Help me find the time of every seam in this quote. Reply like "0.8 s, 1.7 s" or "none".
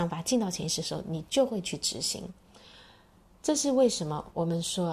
none